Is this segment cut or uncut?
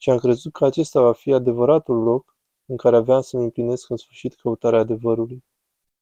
uncut